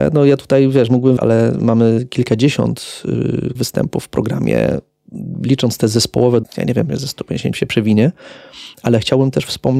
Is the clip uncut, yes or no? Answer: no